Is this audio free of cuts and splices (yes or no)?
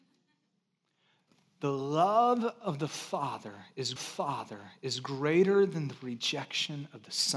no